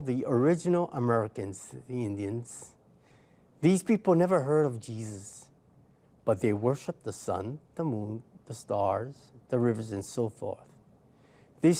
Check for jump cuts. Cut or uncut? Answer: uncut